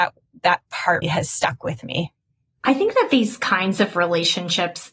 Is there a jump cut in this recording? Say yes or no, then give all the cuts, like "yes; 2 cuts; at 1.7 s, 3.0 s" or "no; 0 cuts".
yes; 1 cut; at 1.0 s